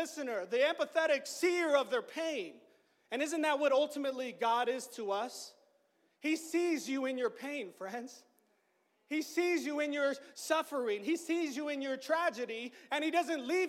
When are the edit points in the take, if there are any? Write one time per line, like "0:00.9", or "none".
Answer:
none